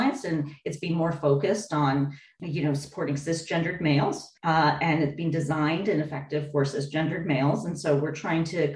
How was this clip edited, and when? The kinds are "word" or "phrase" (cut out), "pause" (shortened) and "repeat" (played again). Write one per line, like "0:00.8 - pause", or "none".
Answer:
0:04.4 - pause